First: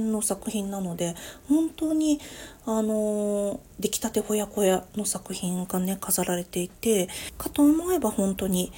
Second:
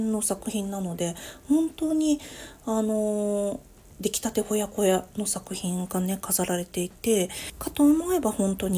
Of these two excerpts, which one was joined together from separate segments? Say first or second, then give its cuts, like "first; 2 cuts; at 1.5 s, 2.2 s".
first; 1 cut; at 3.7 s